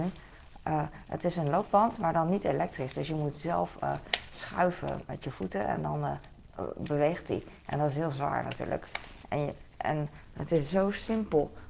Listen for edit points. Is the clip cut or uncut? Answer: uncut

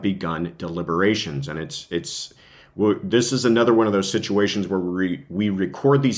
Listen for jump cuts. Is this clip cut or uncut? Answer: uncut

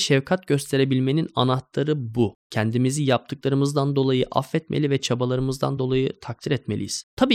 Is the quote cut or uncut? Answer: uncut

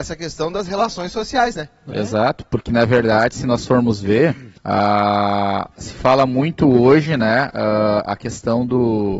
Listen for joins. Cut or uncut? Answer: cut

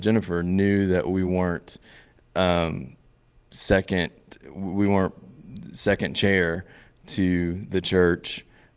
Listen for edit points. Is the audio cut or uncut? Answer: uncut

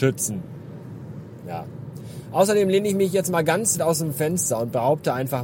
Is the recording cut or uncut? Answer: cut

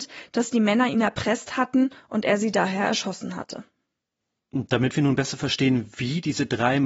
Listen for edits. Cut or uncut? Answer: uncut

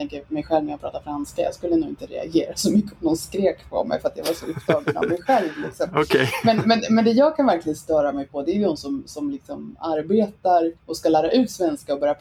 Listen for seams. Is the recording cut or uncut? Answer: cut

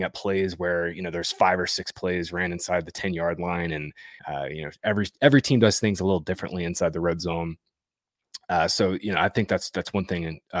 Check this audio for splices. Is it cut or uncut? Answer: cut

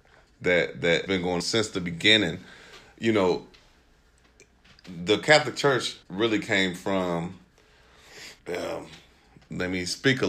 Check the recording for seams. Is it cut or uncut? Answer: cut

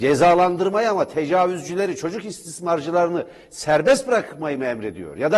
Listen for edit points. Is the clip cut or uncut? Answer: uncut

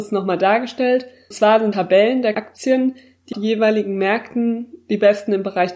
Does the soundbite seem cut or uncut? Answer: cut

